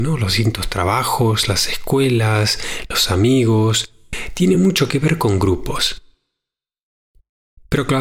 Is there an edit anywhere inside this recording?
no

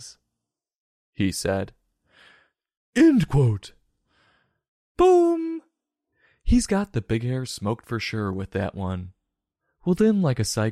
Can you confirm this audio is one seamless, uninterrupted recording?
yes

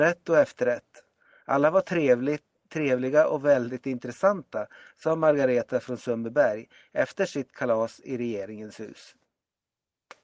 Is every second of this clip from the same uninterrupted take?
yes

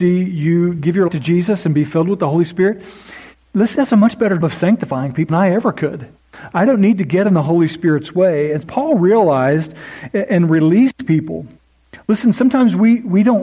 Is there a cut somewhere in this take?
yes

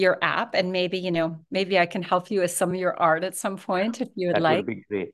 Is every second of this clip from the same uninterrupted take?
yes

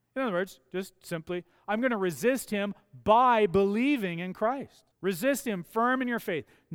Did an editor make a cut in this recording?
yes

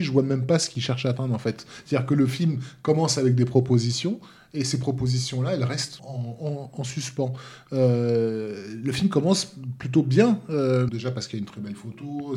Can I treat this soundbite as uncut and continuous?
no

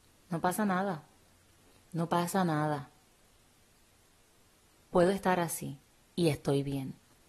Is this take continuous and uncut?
yes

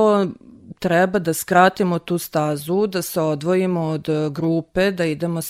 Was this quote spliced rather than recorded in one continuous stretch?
no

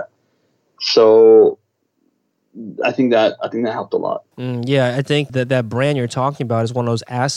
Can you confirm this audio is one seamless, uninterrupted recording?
no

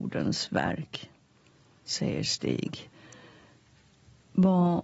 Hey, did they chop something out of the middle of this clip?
no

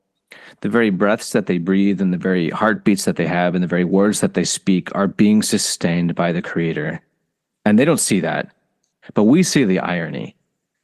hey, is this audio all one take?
yes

